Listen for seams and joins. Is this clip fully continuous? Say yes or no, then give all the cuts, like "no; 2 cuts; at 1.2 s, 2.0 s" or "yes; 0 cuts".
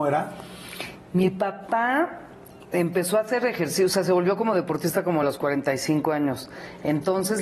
yes; 0 cuts